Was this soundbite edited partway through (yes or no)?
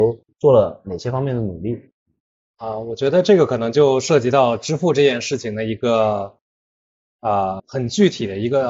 yes